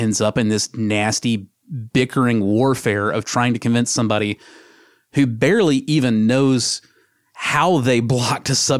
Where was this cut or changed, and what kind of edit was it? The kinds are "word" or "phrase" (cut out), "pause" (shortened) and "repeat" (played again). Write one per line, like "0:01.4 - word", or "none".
none